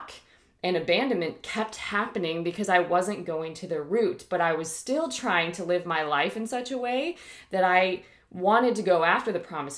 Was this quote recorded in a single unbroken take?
yes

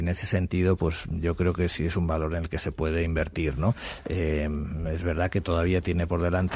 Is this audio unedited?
yes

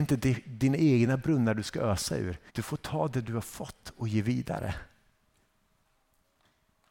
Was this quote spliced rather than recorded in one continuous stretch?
yes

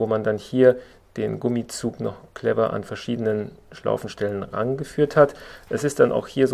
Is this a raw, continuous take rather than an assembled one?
yes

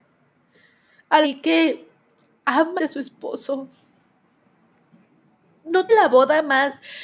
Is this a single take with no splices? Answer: no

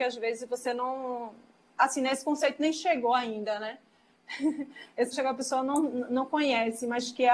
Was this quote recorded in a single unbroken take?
no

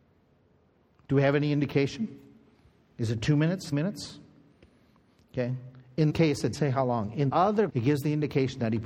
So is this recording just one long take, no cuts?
no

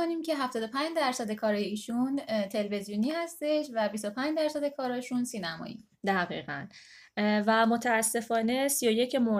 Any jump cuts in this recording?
no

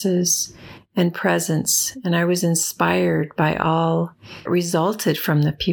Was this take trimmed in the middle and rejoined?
yes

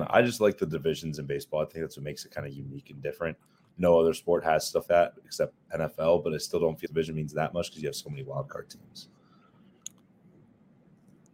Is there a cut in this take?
yes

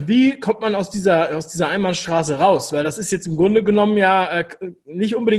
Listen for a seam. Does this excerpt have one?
no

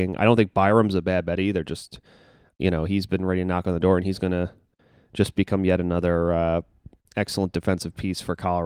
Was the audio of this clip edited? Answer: no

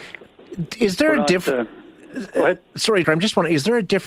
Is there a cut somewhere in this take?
yes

